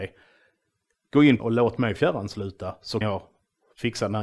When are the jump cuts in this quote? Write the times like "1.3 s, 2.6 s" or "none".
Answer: 1.4 s, 3.0 s

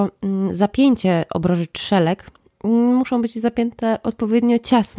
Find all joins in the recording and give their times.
none

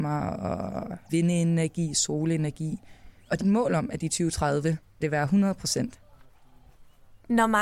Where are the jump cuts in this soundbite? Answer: 1.1 s, 3.4 s, 5.0 s

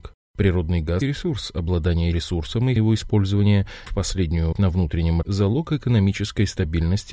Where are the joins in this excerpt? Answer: 1.0 s, 2.1 s, 2.8 s, 3.9 s, 4.5 s, 5.2 s

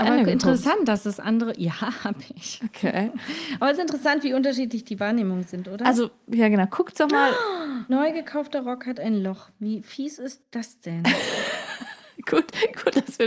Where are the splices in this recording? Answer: 7.9 s

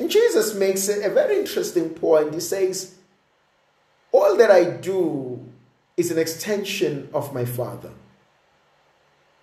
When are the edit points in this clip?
none

